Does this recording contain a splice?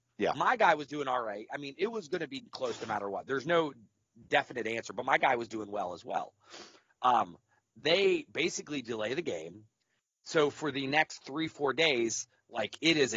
no; 0 cuts

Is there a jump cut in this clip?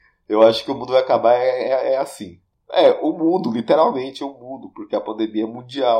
yes; 1 cut; at 2.5 s

